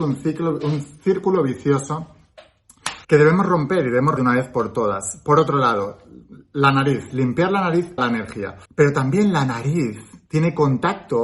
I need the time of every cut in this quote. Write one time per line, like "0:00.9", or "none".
0:03.0
0:04.2
0:08.0
0:08.6